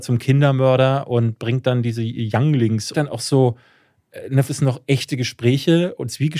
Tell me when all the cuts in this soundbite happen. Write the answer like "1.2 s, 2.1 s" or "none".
2.9 s, 4.5 s